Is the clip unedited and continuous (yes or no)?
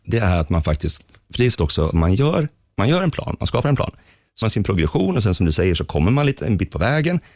no